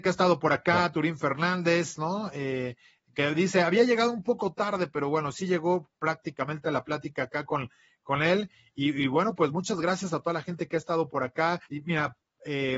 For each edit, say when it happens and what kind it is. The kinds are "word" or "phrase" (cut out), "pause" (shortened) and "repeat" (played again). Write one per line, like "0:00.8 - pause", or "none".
0:11.6 - pause